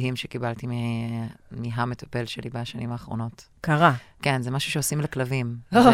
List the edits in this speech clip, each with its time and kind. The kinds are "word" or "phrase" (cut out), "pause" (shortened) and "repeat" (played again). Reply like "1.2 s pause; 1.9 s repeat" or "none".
1.4 s pause